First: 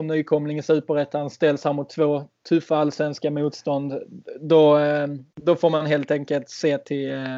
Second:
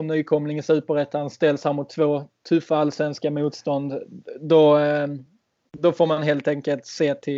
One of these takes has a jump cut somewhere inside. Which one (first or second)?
first